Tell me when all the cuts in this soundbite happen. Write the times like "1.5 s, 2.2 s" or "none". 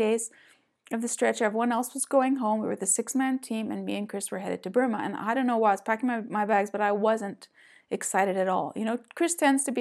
none